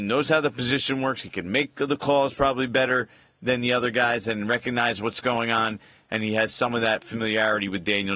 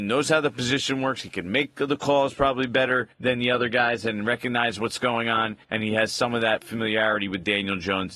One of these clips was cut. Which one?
second; 2 cuts; at 3.1 s, 5.6 s

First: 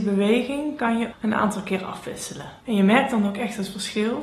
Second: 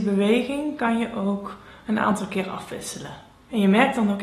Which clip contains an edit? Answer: first; 2 cuts; at 1.1 s, 2.6 s

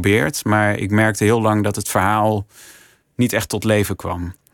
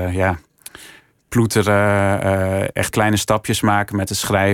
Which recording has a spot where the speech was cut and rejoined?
second; 1 cut; at 2.9 s

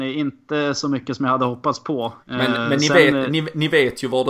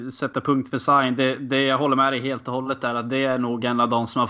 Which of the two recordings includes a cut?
first; 1 cut; at 2.2 s

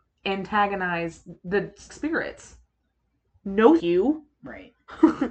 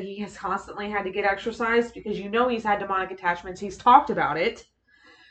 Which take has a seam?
first; 2 cuts; at 1.9 s, 3.8 s

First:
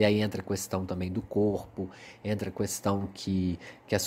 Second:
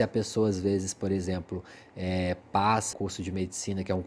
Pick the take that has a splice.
second; 1 cut; at 2.9 s

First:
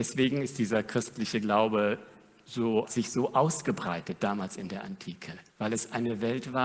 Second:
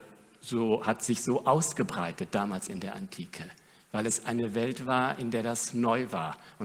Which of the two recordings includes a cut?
first; 2 cuts; at 2.8 s, 5.5 s

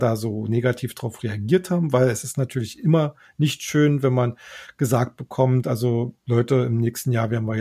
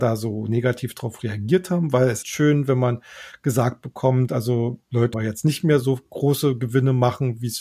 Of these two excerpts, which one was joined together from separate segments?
second; 2 cuts; at 2.2 s, 5.1 s

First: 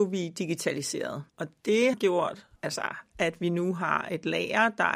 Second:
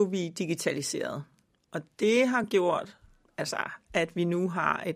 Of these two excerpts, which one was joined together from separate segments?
first; 3 cuts; at 1.3 s, 1.9 s, 2.6 s

